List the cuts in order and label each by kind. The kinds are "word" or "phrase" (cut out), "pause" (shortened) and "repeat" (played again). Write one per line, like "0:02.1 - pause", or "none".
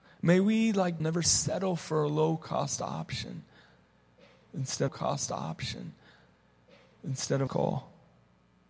0:01.0 - word
0:04.9 - repeat
0:07.5 - phrase